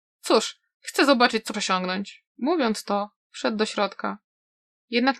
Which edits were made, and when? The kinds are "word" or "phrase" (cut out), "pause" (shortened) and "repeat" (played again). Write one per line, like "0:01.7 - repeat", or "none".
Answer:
0:01.5 - word
0:02.3 - pause